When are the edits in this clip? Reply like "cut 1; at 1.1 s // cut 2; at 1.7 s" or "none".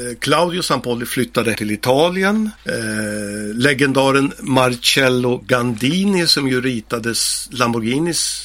cut 1; at 1.5 s // cut 2; at 2.6 s